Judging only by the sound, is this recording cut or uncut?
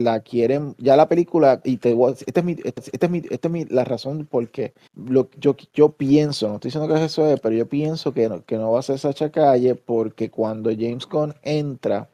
cut